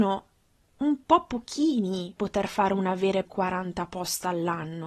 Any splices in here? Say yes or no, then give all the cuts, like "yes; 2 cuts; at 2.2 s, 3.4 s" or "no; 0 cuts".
yes; 2 cuts; at 2.2 s, 3.2 s